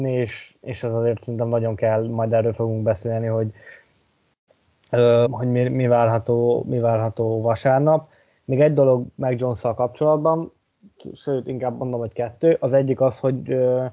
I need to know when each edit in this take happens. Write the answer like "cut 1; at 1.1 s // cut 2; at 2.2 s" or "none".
cut 1; at 5.3 s